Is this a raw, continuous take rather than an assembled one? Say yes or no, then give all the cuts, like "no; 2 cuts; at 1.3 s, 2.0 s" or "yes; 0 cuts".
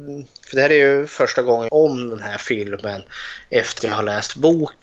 no; 2 cuts; at 1.7 s, 3.8 s